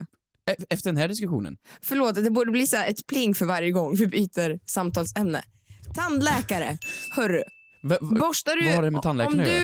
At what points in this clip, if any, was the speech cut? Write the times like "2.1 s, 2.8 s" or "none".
none